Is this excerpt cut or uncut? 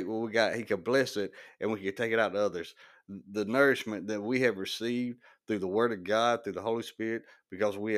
uncut